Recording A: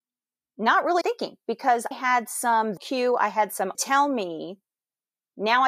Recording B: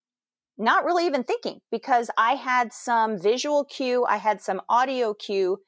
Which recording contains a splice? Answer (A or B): A